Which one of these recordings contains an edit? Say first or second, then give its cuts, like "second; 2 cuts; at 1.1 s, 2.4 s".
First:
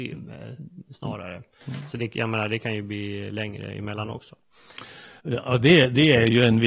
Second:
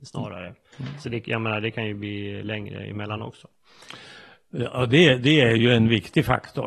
first; 1 cut; at 5.2 s